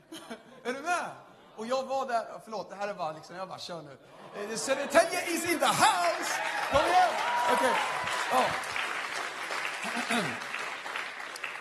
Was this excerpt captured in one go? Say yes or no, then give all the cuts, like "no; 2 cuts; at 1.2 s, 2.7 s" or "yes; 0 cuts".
yes; 0 cuts